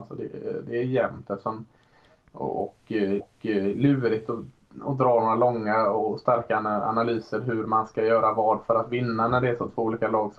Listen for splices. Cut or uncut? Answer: cut